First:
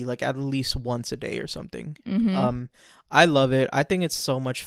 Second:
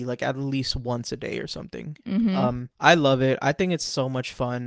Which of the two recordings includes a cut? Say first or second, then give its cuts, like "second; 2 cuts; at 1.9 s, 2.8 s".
second; 1 cut; at 2.7 s